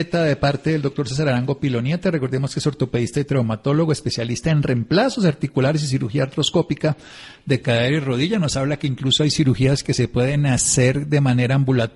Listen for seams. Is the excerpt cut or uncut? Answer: uncut